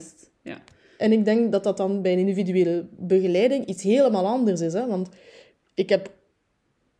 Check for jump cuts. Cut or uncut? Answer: uncut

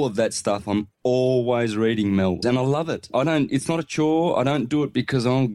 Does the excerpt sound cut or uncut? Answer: cut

